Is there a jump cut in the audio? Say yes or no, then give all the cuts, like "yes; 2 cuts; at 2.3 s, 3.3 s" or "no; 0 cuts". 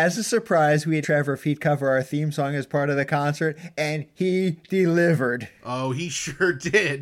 yes; 1 cut; at 1.0 s